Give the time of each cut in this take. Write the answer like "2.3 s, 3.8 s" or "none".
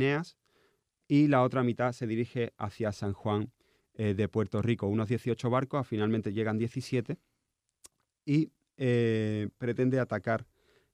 none